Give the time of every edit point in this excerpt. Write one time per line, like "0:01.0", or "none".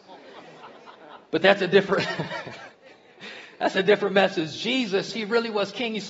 0:01.3
0:02.7

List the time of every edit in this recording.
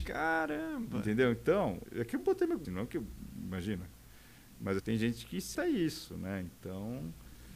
0:01.8
0:02.6
0:04.8
0:05.5

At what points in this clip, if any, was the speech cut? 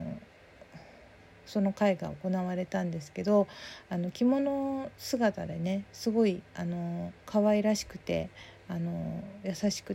0:07.2

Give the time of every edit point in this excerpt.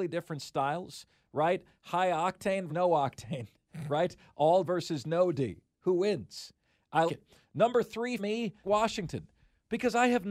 0:02.7
0:04.6
0:07.1
0:08.2
0:08.6

